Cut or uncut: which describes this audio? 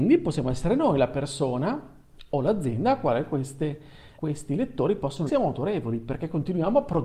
cut